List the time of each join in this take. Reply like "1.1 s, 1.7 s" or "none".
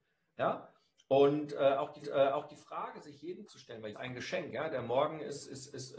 2.0 s, 3.5 s, 3.9 s